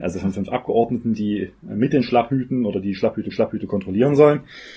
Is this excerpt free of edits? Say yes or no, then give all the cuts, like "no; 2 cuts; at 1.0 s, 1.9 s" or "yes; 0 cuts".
no; 1 cut; at 3.3 s